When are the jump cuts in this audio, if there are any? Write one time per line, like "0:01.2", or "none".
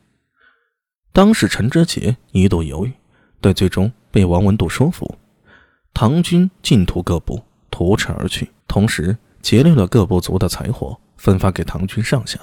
0:08.6